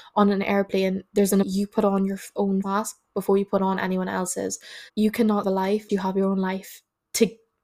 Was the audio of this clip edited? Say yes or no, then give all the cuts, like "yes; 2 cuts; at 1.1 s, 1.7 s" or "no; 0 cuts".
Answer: yes; 6 cuts; at 1.1 s, 1.4 s, 2.6 s, 4.9 s, 5.4 s, 5.9 s